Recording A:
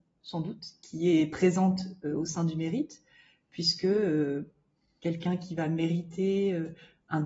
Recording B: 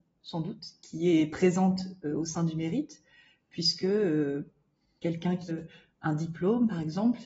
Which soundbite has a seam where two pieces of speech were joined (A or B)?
B